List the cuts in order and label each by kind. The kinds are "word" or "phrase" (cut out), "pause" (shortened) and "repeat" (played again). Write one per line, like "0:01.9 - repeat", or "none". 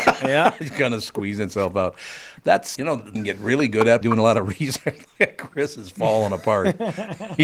0:02.7 - word
0:03.1 - phrase
0:04.0 - word